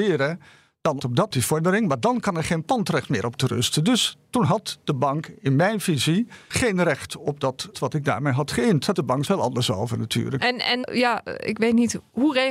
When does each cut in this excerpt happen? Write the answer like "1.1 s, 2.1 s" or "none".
1.0 s, 1.3 s, 3.4 s, 6.5 s, 7.7 s, 8.9 s, 9.2 s, 10.8 s